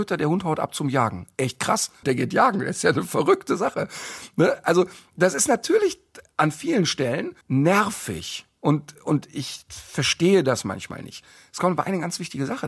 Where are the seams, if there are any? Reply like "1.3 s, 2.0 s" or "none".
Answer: 2.0 s, 7.4 s